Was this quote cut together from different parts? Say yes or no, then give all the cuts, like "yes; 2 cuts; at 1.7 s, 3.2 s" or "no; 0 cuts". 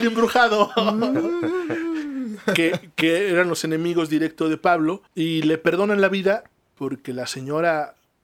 yes; 1 cut; at 5.1 s